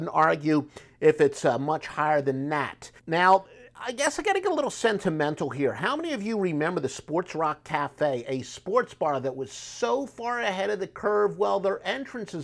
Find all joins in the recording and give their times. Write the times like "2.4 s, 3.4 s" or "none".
3.0 s